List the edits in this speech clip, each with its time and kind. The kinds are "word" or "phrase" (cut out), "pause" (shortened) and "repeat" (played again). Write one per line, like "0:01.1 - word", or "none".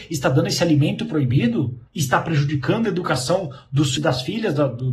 0:01.9 - pause
0:04.0 - word